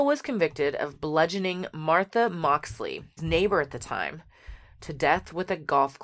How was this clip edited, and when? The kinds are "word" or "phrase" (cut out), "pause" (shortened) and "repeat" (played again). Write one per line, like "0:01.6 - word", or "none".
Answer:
0:03.2 - word

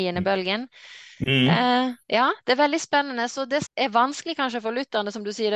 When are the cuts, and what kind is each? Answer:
0:02.0 - pause
0:03.7 - word

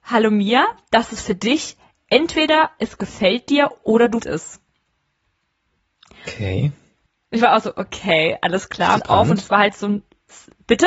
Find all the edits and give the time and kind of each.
0:04.2 - word
0:07.1 - pause
0:09.0 - word

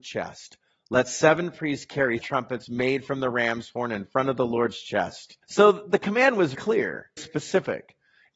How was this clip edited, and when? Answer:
0:02.2 - word
0:05.4 - pause
0:06.5 - word
0:07.2 - word

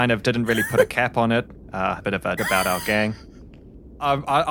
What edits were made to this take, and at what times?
0:02.0 - phrase
0:02.4 - word

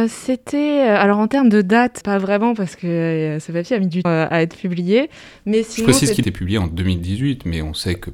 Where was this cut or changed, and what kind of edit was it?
0:02.0 - word
0:04.0 - word
0:06.2 - word

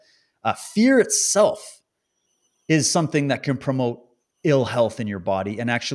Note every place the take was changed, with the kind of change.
none

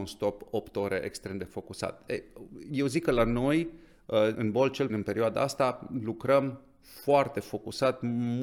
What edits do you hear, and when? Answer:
0:04.3 - word
0:04.9 - word

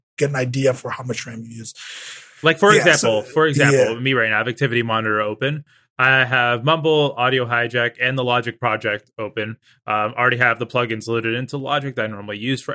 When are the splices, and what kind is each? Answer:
none

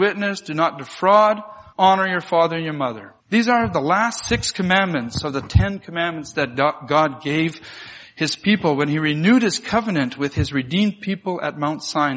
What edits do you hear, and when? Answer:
0:01.7 - pause
0:03.2 - pause

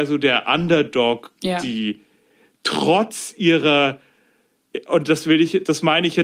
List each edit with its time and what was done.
0:01.4 - word

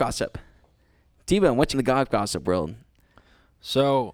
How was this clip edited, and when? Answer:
0:01.7 - word

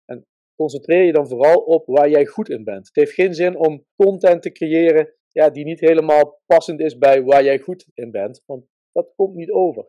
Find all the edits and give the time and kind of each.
0:03.9 - pause
0:05.2 - pause
0:07.9 - pause

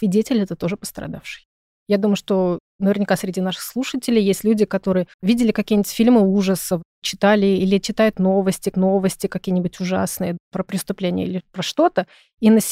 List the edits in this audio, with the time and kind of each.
0:05.1 - pause
0:08.7 - repeat

